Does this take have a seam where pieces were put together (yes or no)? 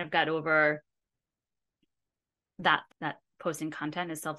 yes